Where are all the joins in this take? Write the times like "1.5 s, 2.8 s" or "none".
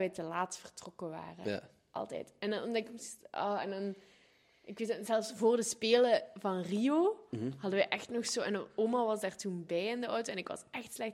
none